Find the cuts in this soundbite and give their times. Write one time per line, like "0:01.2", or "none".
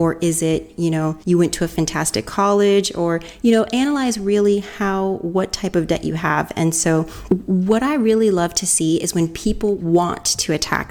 0:01.2